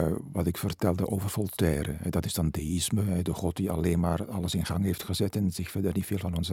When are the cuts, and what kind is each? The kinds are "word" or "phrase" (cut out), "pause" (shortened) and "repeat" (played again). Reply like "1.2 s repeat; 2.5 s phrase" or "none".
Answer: none